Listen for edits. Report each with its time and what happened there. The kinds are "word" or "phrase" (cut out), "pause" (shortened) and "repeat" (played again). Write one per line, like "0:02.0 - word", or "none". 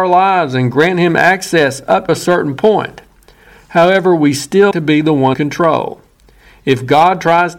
0:02.1 - word
0:04.7 - word
0:05.3 - word